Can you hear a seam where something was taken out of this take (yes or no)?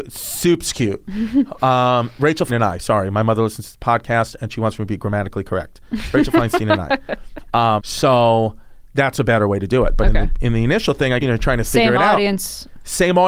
yes